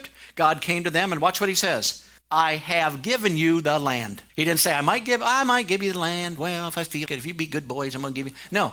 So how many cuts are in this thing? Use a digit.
3